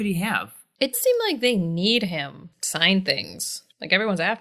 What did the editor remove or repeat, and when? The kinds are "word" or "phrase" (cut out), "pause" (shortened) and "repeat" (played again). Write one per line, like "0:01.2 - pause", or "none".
0:00.9 - word
0:02.5 - word